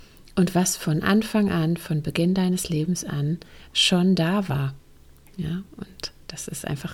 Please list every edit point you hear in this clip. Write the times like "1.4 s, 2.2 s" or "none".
none